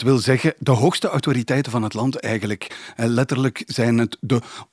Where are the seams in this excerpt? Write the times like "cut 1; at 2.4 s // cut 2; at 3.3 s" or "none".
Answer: none